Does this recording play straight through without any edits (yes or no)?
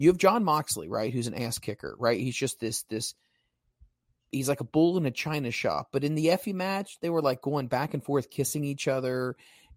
yes